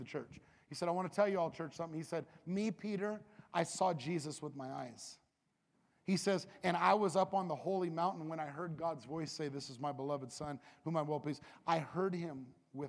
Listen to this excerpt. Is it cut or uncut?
uncut